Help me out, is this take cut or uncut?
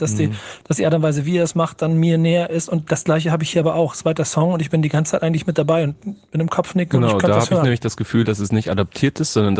uncut